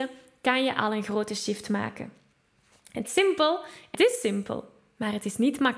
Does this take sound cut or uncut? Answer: cut